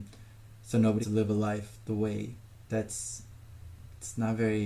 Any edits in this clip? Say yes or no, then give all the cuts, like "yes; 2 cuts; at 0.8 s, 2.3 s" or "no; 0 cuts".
yes; 2 cuts; at 1.0 s, 2.7 s